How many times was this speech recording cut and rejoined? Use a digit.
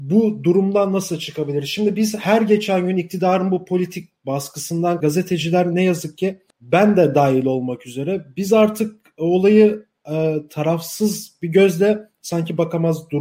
2